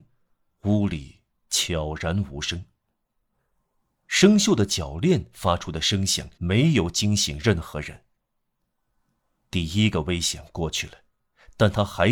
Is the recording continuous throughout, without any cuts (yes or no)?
no